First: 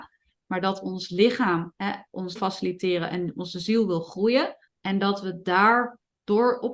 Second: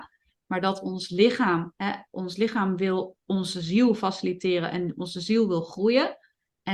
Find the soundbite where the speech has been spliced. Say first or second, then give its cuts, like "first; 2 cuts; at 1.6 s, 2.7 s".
first; 2 cuts; at 2.4 s, 4.7 s